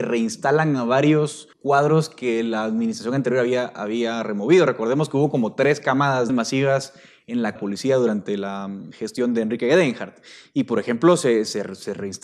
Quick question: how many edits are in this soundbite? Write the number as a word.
three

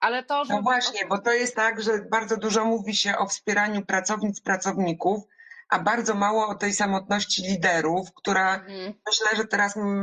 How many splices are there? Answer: one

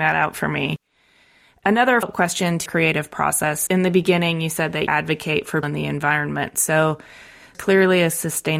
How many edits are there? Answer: six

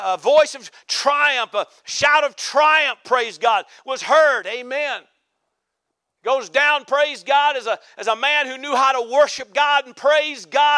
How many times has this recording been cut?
zero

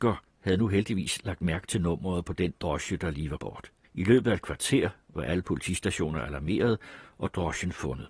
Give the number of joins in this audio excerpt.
two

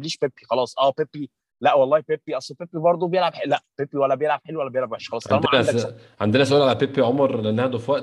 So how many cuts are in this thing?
zero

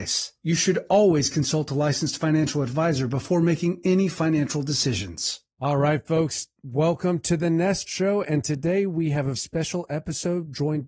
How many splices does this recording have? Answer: one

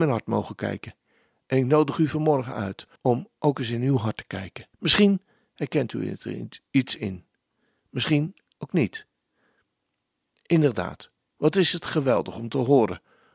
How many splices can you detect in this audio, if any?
two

